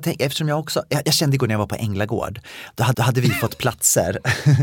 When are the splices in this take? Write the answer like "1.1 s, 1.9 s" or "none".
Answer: 2.9 s